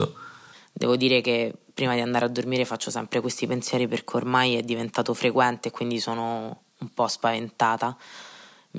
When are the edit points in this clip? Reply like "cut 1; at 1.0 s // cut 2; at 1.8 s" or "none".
none

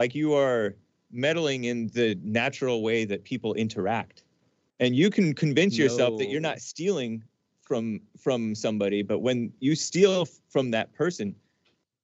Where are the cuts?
none

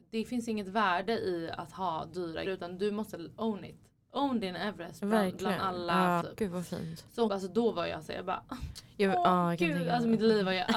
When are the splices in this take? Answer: cut 1; at 2.5 s // cut 2; at 6.2 s // cut 3; at 7.3 s

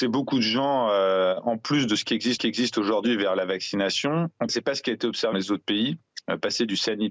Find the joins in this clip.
cut 1; at 2.4 s // cut 2; at 4.5 s // cut 3; at 5.3 s

